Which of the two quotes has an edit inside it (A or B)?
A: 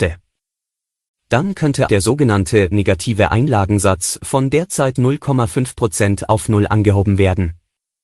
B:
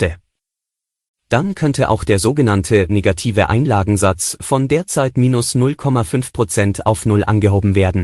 A